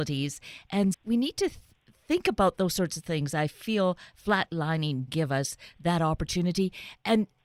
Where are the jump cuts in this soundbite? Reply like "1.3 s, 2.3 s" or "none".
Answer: 0.9 s, 5.1 s